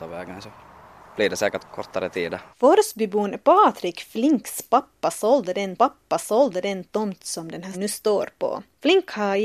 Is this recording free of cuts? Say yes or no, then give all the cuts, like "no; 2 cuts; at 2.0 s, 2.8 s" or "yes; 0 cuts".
no; 4 cuts; at 1.6 s, 2.5 s, 5.8 s, 7.7 s